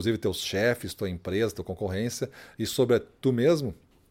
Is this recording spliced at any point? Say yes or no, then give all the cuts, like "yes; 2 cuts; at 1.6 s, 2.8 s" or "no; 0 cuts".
no; 0 cuts